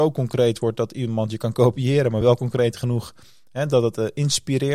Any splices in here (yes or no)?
no